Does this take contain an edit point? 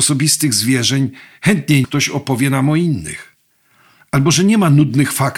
yes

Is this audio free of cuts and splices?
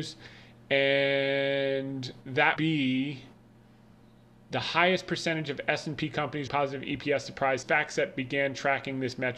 no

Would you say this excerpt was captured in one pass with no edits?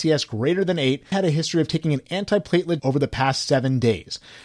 no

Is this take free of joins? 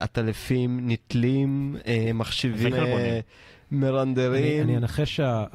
no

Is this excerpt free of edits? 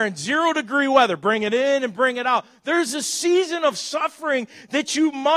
yes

